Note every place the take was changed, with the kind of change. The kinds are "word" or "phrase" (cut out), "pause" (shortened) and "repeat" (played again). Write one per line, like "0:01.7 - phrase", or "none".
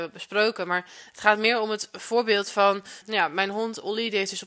0:03.0 - word